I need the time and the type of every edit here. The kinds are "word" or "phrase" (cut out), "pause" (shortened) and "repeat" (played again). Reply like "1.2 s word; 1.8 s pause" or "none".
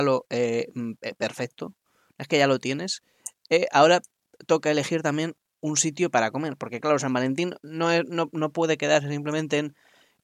none